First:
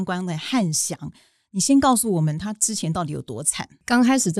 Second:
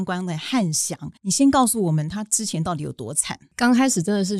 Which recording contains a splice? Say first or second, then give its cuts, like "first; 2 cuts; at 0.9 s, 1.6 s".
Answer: second; 1 cut; at 1.2 s